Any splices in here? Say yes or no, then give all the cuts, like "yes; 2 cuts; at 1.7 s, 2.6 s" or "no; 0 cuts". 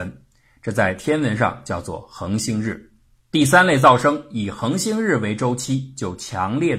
no; 0 cuts